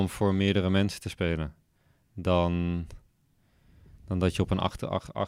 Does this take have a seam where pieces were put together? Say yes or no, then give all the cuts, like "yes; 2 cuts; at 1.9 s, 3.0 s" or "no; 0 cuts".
no; 0 cuts